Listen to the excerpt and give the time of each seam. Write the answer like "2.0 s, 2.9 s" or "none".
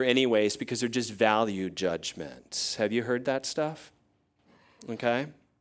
none